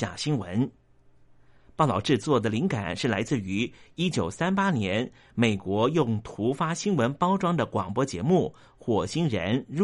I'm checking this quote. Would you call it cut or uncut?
uncut